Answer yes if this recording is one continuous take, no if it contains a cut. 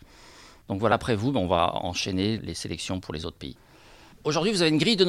no